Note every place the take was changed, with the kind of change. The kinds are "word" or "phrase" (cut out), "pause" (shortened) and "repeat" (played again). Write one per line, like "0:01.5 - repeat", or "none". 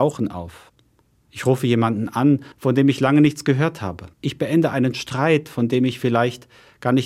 0:02.5 - pause
0:04.1 - pause